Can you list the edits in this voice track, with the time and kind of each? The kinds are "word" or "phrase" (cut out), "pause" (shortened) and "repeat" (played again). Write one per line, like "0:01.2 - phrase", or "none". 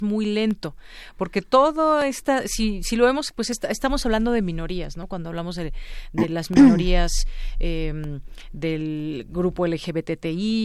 none